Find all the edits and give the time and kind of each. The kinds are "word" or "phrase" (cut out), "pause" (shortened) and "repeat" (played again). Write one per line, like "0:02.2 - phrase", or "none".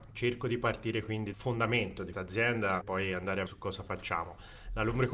0:01.3 - word
0:02.1 - word
0:02.8 - word
0:03.5 - word